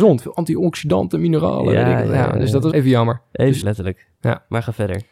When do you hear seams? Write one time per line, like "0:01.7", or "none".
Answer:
0:02.7
0:03.6